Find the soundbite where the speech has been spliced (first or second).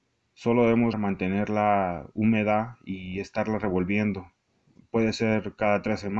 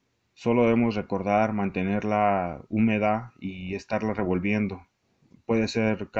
first